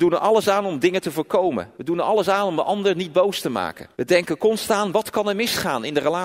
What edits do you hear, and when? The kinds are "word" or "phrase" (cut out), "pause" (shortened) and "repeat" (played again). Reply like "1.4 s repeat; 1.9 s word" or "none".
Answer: 1.8 s pause; 3.9 s pause